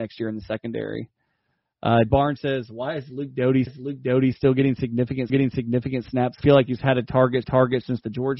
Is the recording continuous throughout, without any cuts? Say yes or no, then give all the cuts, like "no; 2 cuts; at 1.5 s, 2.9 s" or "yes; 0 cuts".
no; 5 cuts; at 2.1 s, 3.7 s, 5.3 s, 6.4 s, 7.4 s